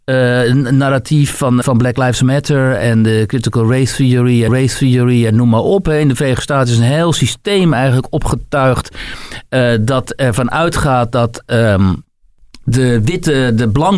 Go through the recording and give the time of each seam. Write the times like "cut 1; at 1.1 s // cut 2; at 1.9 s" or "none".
cut 1; at 1.6 s // cut 2; at 4.5 s